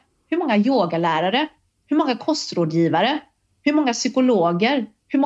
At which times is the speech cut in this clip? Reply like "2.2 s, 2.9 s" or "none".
none